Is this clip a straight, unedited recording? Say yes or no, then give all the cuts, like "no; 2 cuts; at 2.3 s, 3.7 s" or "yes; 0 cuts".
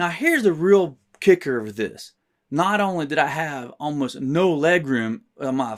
yes; 0 cuts